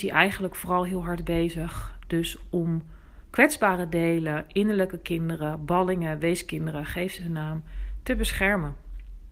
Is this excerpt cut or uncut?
uncut